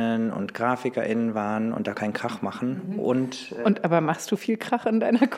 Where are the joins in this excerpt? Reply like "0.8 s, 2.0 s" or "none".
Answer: 1.9 s